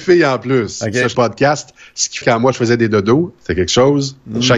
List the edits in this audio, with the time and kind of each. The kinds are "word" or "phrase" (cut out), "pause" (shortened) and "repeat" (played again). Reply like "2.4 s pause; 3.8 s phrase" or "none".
1.1 s phrase; 2.2 s word; 3.4 s pause